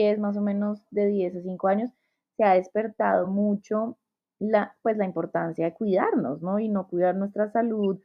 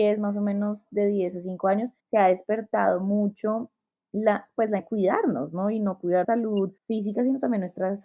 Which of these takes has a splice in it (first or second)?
second